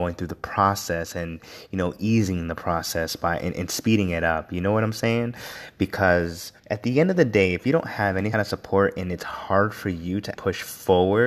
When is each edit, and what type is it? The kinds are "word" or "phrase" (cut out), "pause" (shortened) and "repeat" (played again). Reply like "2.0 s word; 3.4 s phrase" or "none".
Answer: 6.6 s pause; 8.3 s word; 10.3 s word